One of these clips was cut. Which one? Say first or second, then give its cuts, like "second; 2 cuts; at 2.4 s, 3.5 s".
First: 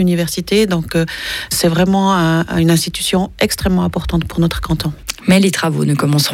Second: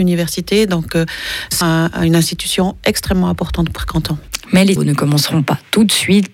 second; 3 cuts; at 1.6 s, 3.8 s, 4.8 s